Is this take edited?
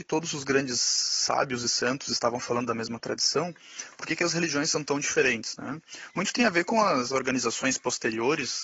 no; 0 cuts

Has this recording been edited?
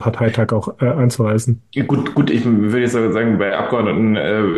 no; 0 cuts

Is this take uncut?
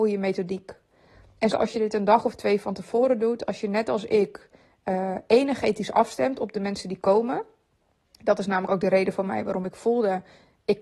no; 1 cut; at 1.5 s

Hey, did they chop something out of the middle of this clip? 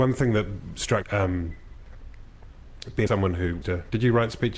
yes; 3 cuts; at 1.0 s, 3.1 s, 3.6 s

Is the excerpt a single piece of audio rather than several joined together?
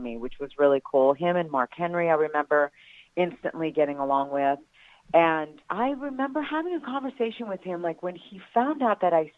no; 1 cut; at 5.6 s

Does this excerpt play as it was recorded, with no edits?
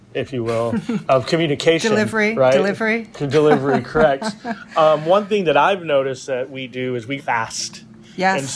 no; 2 cuts; at 1.0 s, 7.2 s

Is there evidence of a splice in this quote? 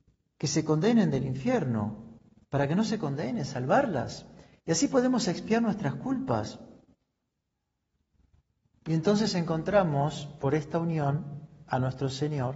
no; 0 cuts

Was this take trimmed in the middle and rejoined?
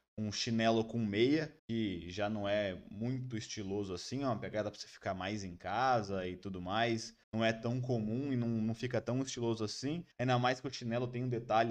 yes; 3 cuts; at 1.6 s, 7.2 s, 10.1 s

